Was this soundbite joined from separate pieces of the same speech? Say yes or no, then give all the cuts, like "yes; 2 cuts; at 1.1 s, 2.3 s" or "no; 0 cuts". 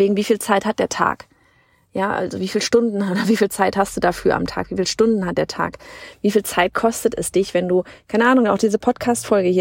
no; 0 cuts